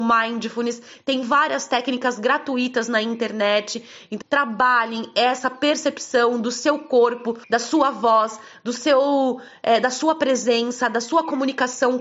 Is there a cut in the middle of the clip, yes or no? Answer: yes